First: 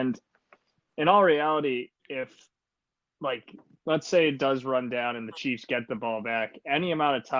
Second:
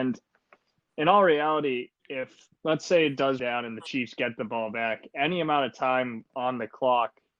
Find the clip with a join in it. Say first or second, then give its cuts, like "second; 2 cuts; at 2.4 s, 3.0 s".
second; 2 cuts; at 2.5 s, 3.4 s